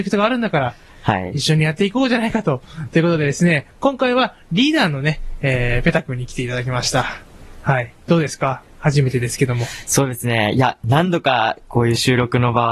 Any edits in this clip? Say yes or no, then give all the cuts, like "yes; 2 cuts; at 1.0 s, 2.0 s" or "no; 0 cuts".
no; 0 cuts